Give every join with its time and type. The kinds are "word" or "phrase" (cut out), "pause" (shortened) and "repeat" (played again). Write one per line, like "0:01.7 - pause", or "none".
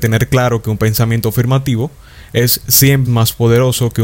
0:03.0 - word